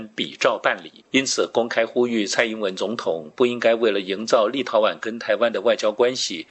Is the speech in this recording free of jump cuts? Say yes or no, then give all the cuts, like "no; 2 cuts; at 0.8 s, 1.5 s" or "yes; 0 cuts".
no; 1 cut; at 1.0 s